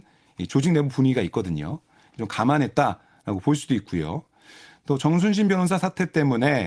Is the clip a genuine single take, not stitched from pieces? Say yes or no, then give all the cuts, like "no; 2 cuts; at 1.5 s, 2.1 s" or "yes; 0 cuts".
yes; 0 cuts